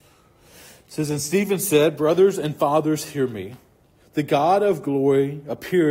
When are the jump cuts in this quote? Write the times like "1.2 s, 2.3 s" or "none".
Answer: none